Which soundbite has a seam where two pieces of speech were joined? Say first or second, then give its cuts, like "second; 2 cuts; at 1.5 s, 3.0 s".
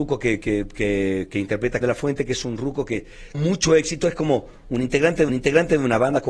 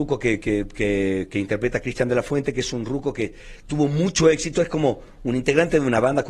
first; 3 cuts; at 1.8 s, 3.3 s, 5.3 s